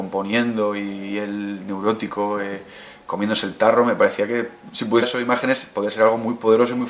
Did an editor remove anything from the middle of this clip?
yes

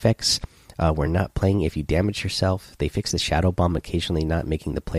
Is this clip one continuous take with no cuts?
yes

